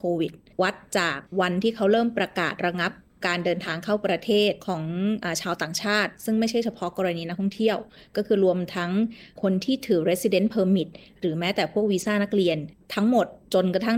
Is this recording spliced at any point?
no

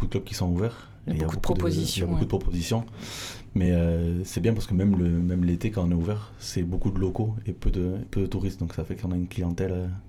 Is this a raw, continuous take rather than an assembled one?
yes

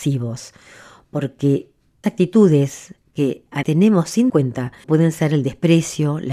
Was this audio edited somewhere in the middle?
yes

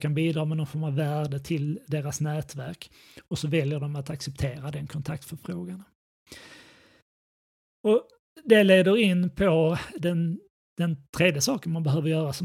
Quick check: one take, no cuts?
yes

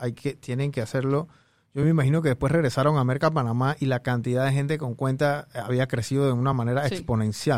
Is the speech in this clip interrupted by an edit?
no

